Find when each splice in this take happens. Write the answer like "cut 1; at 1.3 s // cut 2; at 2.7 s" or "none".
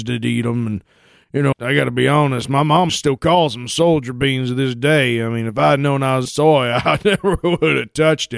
cut 1; at 1.5 s // cut 2; at 2.9 s // cut 3; at 6.3 s